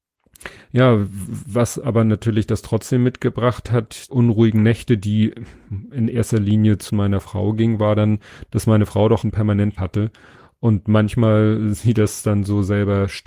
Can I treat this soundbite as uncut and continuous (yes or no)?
no